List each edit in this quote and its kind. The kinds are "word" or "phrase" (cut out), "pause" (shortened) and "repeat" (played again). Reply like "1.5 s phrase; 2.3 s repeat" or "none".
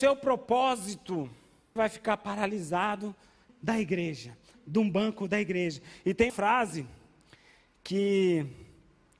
1.8 s word; 3.5 s word; 4.5 s word; 6.3 s word